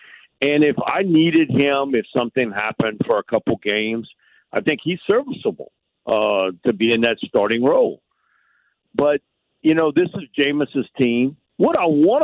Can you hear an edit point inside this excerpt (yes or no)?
no